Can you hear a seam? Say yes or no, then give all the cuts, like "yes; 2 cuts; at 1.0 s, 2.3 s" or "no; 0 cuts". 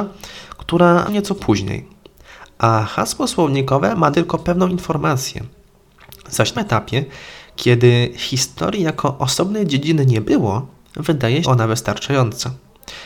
yes; 4 cuts; at 1.1 s, 4.1 s, 6.5 s, 11.4 s